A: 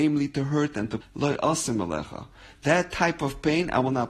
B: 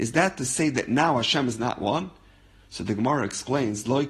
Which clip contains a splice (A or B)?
A